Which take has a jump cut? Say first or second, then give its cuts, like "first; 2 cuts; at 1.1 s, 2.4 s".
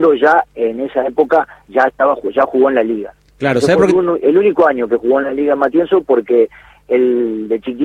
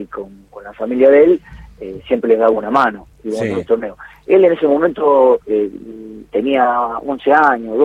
second; 1 cut; at 5.4 s